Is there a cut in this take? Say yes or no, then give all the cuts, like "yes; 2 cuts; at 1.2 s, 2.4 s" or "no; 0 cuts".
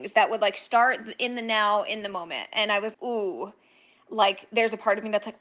yes; 1 cut; at 2.9 s